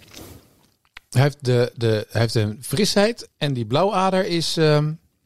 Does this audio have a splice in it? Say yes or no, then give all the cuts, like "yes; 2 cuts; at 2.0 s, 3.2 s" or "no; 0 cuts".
yes; 1 cut; at 3.3 s